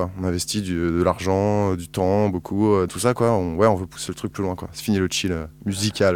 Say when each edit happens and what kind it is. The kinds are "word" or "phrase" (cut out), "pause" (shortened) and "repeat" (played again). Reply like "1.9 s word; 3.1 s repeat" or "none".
2.9 s word